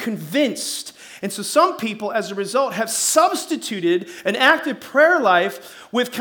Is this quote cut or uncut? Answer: uncut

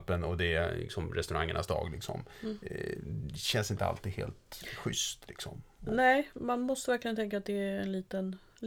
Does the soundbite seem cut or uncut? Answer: uncut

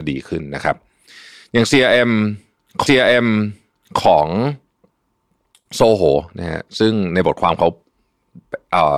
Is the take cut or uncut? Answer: cut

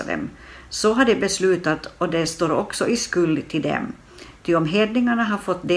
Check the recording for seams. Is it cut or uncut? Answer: uncut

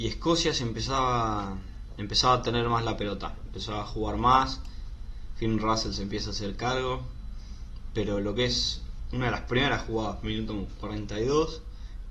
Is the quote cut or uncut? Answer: uncut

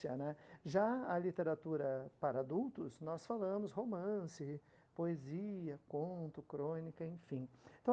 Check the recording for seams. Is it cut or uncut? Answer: uncut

